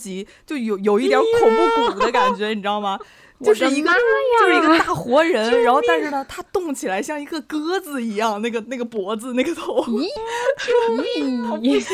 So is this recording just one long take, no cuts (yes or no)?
no